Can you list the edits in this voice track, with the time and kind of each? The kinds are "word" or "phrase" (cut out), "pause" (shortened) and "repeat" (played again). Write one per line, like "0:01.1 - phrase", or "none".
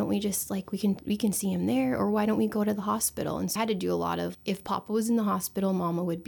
0:03.6 - word
0:04.3 - word